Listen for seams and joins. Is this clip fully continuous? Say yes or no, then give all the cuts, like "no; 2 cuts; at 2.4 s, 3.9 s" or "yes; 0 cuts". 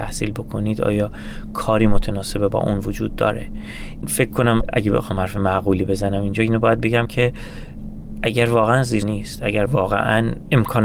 no; 1 cut; at 9.0 s